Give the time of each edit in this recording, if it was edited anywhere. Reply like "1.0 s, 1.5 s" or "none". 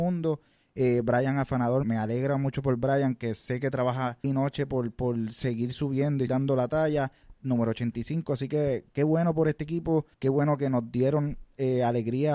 1.8 s, 4.2 s, 6.3 s, 10.1 s